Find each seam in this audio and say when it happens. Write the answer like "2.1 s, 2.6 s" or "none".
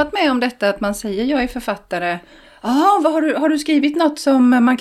none